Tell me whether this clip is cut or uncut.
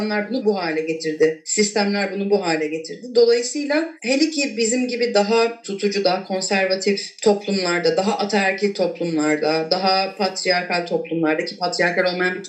uncut